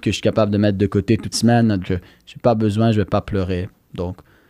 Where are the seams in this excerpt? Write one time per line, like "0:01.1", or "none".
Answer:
0:01.3
0:01.8